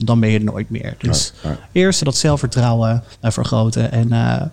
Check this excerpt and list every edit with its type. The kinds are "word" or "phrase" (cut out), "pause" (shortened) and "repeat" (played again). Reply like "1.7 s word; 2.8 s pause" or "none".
2.0 s word; 3.1 s pause